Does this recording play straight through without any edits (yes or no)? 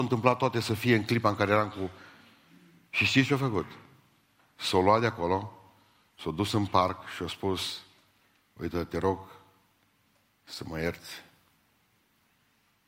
yes